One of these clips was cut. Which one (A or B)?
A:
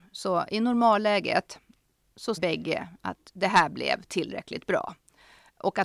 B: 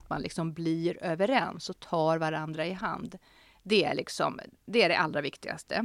A